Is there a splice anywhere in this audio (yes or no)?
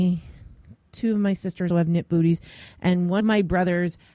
yes